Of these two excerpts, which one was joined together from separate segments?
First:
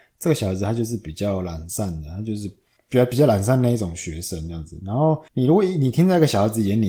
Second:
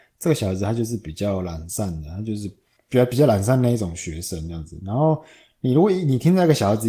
first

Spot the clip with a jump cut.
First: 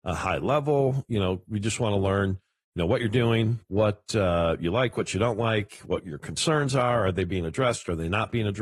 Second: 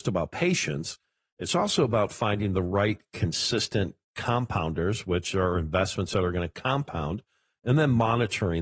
first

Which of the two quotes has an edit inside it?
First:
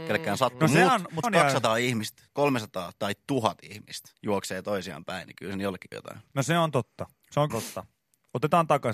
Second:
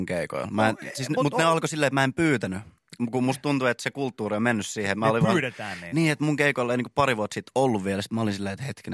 first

